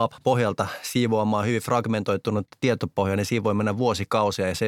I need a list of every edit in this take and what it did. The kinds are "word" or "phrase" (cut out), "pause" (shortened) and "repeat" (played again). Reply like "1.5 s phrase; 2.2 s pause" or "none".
none